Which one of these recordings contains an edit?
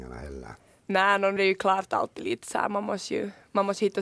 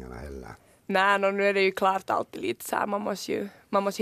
first; 1 cut; at 1.4 s

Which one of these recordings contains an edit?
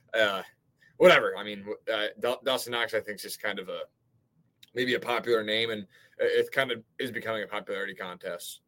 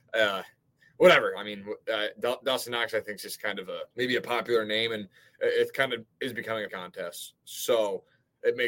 second; 2 cuts; at 3.9 s, 6.7 s

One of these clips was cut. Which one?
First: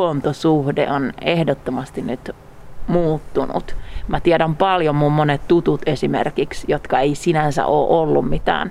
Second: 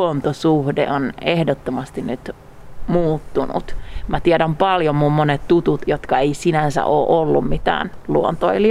second; 1 cut; at 5.8 s

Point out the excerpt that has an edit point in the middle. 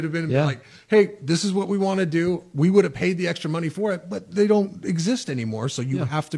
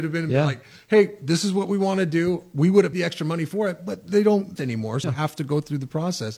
second; 3 cuts; at 2.9 s, 4.6 s, 5.0 s

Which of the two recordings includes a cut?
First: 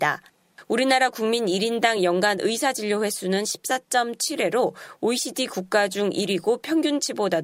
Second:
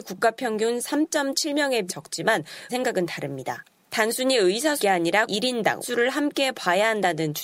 second; 5 cuts; at 1.9 s, 2.7 s, 4.8 s, 5.3 s, 5.8 s

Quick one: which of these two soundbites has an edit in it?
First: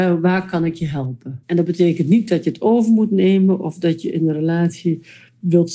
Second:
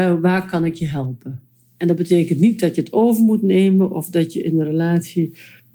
first; 1 cut; at 1.4 s

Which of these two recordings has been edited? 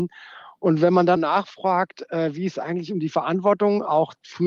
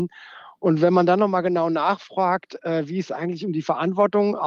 first; 1 cut; at 1.2 s

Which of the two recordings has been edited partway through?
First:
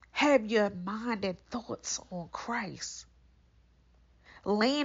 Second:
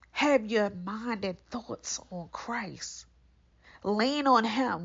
second; 1 cut; at 3.5 s

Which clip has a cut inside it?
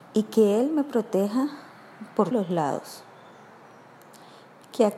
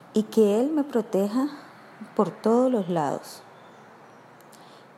first; 1 cut; at 2.3 s

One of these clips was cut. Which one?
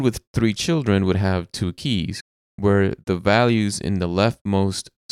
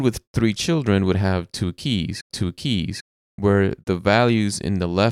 second; 1 cut; at 2.3 s

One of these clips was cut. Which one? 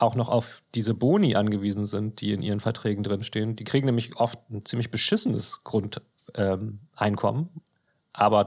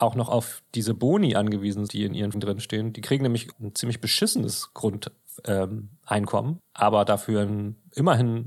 second; 4 cuts; at 1.9 s, 2.3 s, 3.5 s, 6.6 s

